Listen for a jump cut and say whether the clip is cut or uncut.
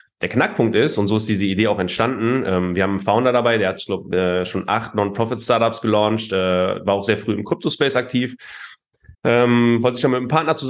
cut